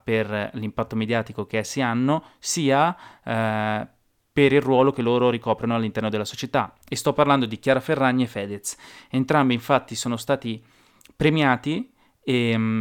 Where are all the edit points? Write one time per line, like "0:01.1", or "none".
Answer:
none